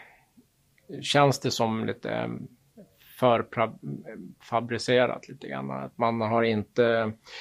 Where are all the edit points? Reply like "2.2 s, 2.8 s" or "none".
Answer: none